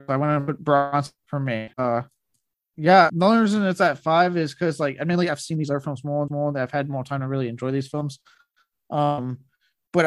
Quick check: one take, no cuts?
no; 4 cuts; at 1.2 s, 1.7 s, 3.1 s, 6.3 s

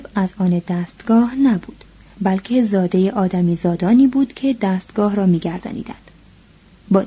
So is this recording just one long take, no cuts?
yes; 0 cuts

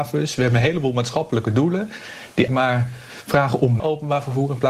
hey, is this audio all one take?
no; 2 cuts; at 2.5 s, 3.8 s

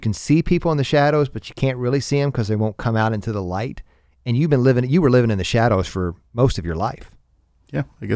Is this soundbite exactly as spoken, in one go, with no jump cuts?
no; 1 cut; at 6.3 s

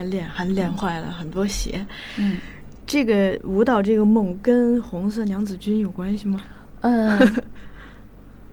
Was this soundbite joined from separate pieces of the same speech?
no; 0 cuts

